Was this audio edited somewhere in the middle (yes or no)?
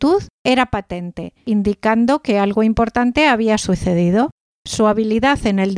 no